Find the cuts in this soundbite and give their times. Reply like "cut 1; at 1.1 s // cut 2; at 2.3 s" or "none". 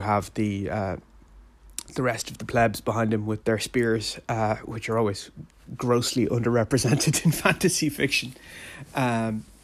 cut 1; at 3.4 s

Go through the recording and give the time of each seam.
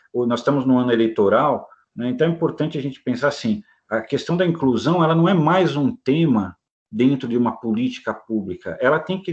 none

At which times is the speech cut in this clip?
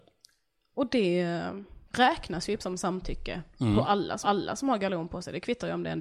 cut 1; at 1.9 s // cut 2; at 2.6 s // cut 3; at 4.2 s

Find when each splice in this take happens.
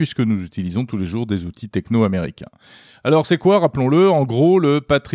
none

